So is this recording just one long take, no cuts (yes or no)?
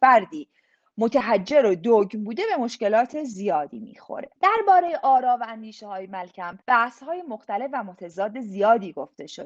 no